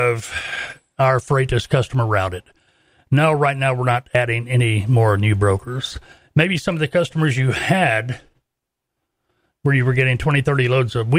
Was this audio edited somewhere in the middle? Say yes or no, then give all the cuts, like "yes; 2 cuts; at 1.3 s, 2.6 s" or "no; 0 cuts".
no; 0 cuts